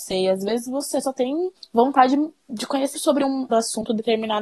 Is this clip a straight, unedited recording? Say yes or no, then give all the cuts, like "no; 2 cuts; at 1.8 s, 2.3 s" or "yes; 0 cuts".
no; 3 cuts; at 1.6 s, 2.9 s, 3.5 s